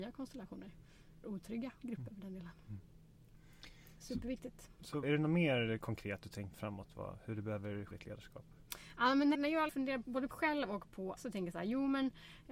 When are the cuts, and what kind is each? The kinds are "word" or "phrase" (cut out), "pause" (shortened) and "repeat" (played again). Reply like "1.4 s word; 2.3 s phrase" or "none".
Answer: 1.2 s word; 5.0 s word; 6.5 s word; 7.9 s word; 9.3 s word; 9.7 s word; 10.3 s word; 11.2 s word

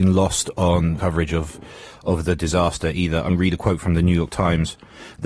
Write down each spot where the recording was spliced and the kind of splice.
1.0 s word; 3.3 s word

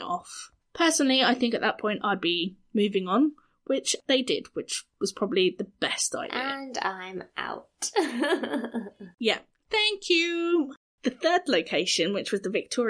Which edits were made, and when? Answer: none

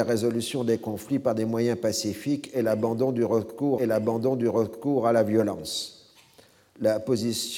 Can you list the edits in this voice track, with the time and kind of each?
3.8 s repeat

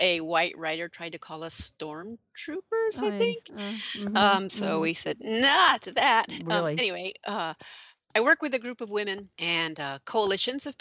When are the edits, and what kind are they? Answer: none

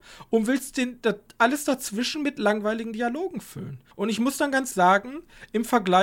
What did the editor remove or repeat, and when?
3.9 s pause; 4.7 s word

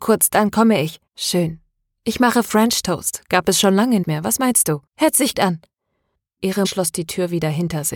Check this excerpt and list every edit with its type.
1.1 s pause; 4.0 s word; 4.9 s pause; 5.3 s word; 6.6 s word

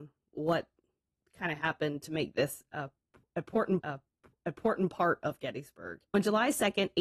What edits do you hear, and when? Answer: 1.0 s pause; 3.8 s repeat; 6.1 s pause

